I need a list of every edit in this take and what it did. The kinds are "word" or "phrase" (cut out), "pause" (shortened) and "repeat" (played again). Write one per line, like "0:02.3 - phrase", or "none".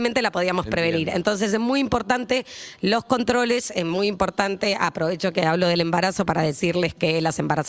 none